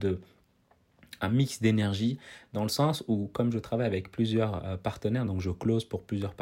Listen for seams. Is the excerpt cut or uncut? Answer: uncut